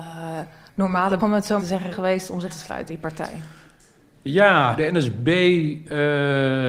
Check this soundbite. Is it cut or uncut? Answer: cut